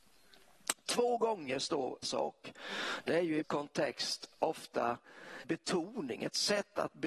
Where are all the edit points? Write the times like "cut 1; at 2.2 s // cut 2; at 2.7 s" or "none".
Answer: cut 1; at 2.0 s // cut 2; at 3.4 s // cut 3; at 5.4 s